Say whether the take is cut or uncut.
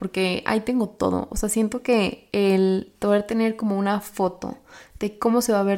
uncut